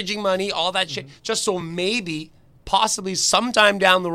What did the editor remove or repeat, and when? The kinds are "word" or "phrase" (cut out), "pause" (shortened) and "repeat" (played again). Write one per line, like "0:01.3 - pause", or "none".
none